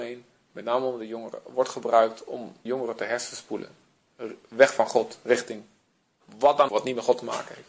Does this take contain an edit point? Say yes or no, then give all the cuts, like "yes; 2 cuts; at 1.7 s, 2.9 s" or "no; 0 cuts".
yes; 2 cuts; at 2.7 s, 6.7 s